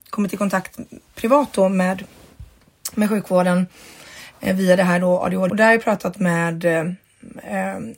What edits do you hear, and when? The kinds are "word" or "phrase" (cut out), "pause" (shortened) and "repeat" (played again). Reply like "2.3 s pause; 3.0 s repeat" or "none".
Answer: 5.5 s phrase